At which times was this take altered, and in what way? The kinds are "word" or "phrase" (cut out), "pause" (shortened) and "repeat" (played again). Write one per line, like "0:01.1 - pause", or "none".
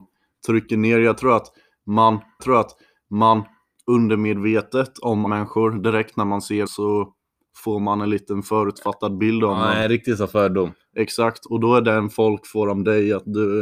0:02.4 - repeat
0:05.3 - word
0:06.7 - word